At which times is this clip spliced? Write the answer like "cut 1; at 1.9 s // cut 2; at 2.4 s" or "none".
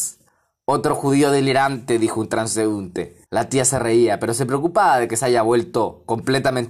cut 1; at 3.3 s